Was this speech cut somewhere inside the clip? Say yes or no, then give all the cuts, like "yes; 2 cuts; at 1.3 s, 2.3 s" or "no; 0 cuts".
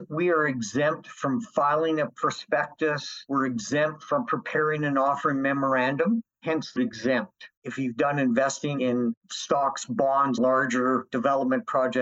yes; 4 cuts; at 6.8 s, 7.6 s, 9.2 s, 10.4 s